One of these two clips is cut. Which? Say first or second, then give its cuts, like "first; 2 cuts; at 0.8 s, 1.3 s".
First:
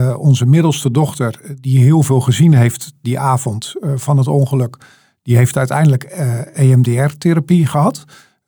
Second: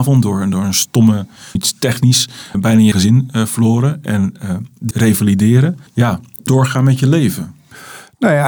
second; 6 cuts; at 1.6 s, 2.5 s, 2.9 s, 4.9 s, 5.9 s, 6.5 s